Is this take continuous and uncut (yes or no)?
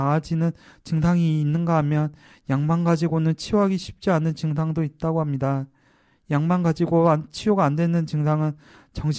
yes